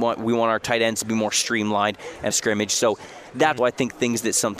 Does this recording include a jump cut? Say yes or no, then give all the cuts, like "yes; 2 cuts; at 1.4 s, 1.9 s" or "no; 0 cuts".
yes; 2 cuts; at 2.3 s, 3.6 s